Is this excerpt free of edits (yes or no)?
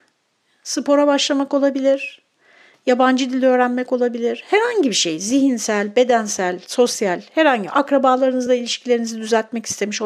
yes